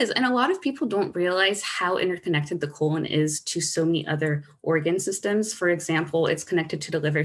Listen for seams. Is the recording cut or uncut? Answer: uncut